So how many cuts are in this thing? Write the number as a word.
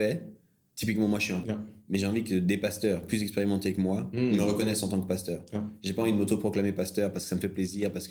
one